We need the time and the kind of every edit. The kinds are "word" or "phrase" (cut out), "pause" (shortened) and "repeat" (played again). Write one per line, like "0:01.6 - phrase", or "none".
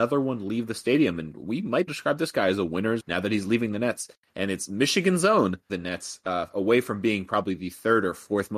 0:01.9 - phrase
0:03.0 - word
0:05.7 - phrase